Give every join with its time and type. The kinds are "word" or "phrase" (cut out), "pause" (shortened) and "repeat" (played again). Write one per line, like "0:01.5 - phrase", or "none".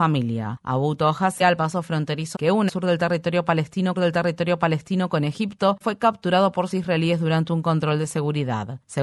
0:01.4 - word
0:02.3 - phrase
0:02.7 - word
0:03.9 - repeat
0:05.8 - word
0:06.7 - word